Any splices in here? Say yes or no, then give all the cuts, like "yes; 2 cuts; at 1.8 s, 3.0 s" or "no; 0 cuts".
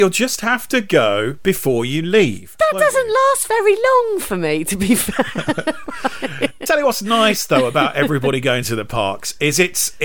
no; 0 cuts